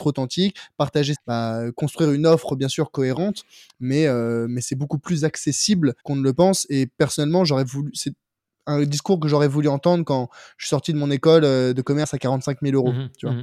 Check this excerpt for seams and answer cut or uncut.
cut